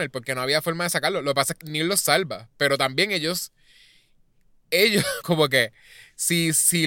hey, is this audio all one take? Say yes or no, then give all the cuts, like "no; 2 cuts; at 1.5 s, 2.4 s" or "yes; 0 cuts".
no; 2 cuts; at 1.6 s, 5.2 s